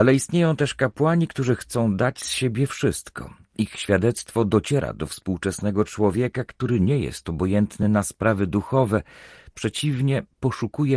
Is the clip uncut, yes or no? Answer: yes